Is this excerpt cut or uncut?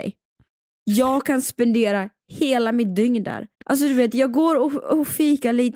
cut